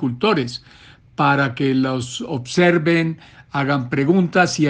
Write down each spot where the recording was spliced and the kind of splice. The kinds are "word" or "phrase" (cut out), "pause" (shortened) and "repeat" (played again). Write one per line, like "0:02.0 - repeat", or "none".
none